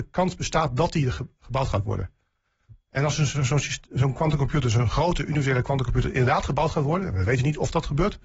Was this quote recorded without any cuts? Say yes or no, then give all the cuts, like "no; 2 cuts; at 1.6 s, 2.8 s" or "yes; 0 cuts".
yes; 0 cuts